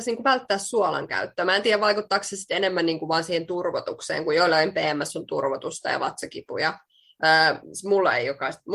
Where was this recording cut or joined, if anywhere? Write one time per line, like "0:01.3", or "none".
none